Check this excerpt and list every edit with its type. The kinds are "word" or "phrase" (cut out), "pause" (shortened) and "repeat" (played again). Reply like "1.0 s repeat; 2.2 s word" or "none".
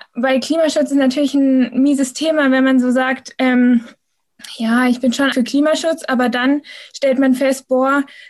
5.3 s word